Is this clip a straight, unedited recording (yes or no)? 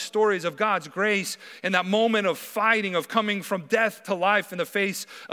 yes